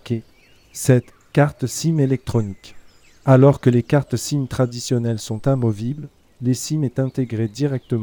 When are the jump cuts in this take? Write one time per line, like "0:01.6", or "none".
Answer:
none